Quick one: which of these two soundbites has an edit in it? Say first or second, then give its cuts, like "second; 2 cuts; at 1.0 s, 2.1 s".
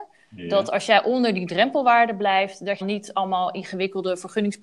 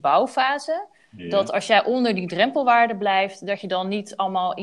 first; 1 cut; at 2.8 s